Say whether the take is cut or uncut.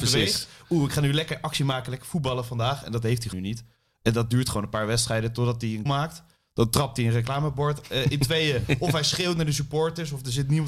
cut